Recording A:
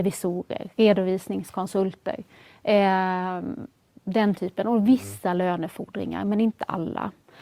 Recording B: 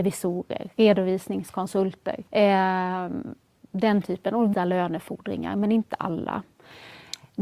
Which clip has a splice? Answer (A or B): B